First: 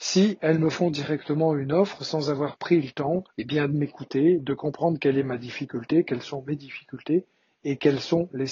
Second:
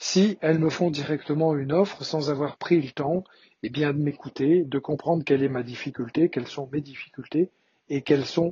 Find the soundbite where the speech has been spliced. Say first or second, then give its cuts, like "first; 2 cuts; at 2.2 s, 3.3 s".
first; 1 cut; at 3.3 s